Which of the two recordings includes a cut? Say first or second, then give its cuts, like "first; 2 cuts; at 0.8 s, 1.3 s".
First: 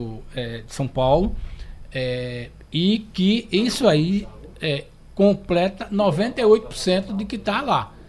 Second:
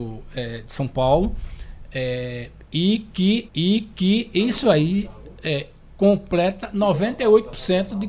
second; 1 cut; at 3.5 s